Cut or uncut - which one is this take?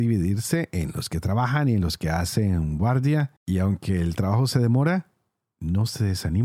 cut